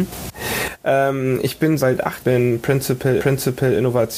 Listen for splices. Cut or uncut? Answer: cut